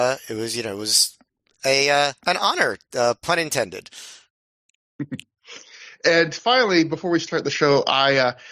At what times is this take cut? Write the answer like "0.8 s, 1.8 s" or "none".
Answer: 2.2 s